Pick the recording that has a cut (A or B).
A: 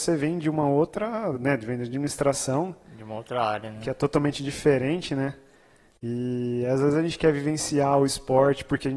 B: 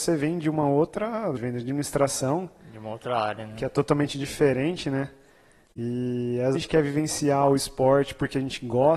B